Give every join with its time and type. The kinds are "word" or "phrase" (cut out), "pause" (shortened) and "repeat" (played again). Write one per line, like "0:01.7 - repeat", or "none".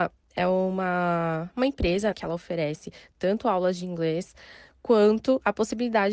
0:02.1 - word